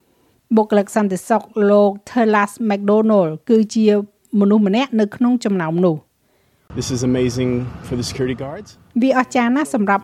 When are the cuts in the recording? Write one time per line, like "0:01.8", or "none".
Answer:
none